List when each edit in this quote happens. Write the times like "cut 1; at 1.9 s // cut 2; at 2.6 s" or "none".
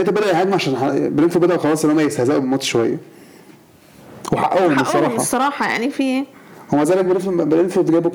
none